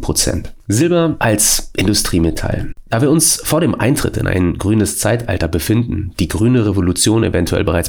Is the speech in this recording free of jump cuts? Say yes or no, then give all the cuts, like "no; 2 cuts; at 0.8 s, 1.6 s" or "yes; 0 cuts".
yes; 0 cuts